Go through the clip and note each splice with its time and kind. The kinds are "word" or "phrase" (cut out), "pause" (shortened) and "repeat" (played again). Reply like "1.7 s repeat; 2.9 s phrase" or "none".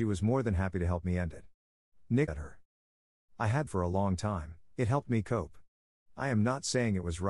2.3 s phrase; 3.7 s phrase